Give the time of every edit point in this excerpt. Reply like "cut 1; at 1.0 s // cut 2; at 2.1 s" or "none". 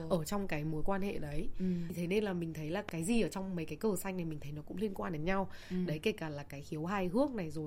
none